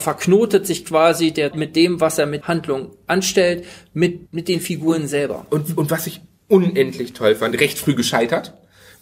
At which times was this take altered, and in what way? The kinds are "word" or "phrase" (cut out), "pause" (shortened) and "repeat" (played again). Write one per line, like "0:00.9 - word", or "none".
0:01.5 - word
0:02.4 - word
0:04.3 - pause
0:07.5 - phrase